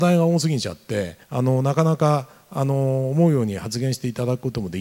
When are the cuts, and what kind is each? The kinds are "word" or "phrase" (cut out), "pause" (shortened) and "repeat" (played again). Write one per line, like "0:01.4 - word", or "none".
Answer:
0:01.2 - pause